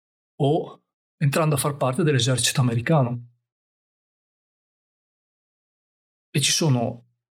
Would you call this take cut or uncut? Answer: uncut